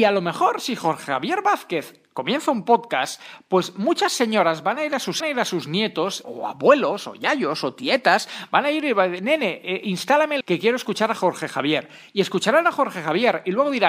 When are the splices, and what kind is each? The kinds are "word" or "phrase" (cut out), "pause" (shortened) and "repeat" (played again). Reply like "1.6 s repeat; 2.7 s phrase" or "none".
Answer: 5.2 s phrase; 6.2 s word; 10.4 s word